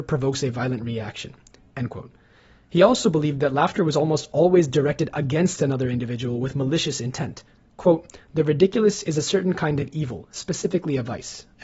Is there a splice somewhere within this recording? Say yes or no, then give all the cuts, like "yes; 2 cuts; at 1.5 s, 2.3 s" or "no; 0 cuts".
no; 0 cuts